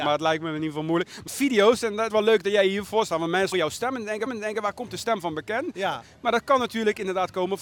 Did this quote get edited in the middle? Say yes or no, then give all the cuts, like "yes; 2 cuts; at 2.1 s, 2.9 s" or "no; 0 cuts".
yes; 4 cuts; at 1.3 s, 2.1 s, 3.5 s, 4.3 s